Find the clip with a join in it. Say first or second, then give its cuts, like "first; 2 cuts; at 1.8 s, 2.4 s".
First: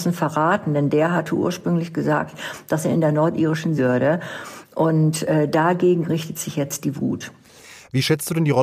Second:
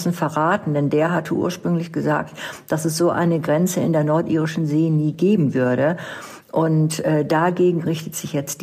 first; 2 cuts; at 2.8 s, 3.8 s